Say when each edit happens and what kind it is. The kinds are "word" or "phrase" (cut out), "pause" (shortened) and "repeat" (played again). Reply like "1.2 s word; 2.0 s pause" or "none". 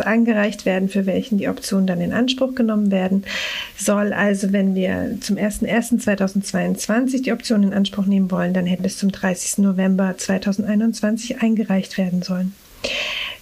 8.8 s word